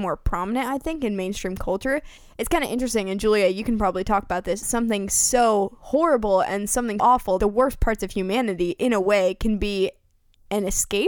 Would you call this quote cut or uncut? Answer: cut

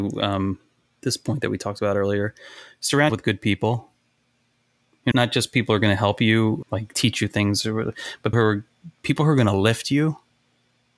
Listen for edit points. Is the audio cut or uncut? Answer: cut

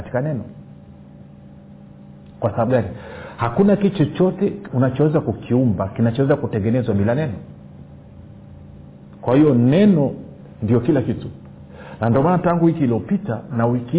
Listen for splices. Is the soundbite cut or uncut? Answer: uncut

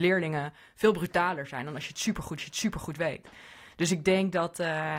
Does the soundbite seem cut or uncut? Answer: cut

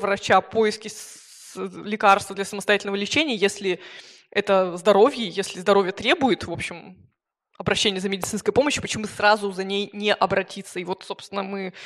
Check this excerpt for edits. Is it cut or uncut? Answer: uncut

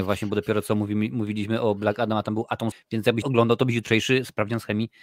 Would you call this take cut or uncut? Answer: cut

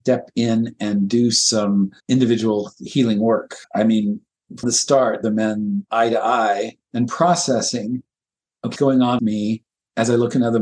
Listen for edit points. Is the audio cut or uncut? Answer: cut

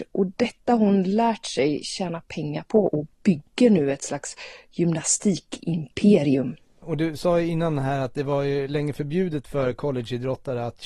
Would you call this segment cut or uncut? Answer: cut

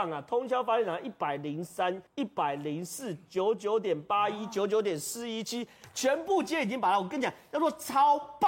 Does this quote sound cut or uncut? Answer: cut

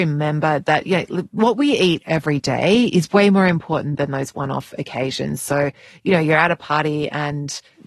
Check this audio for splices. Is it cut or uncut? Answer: uncut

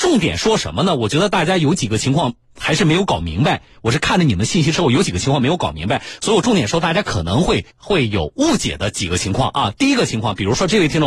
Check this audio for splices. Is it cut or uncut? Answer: cut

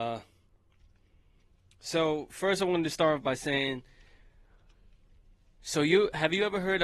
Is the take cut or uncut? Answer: uncut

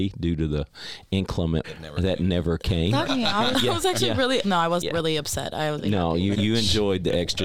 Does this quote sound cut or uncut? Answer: cut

